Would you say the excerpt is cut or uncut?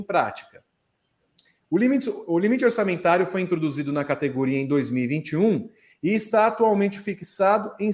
uncut